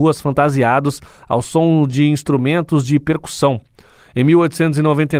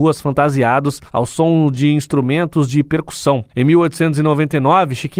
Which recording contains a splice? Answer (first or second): second